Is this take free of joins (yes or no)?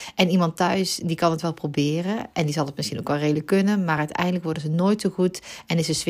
yes